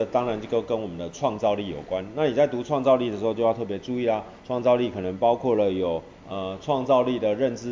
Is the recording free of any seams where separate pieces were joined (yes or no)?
no